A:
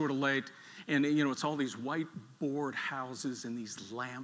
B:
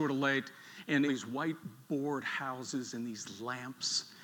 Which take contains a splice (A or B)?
B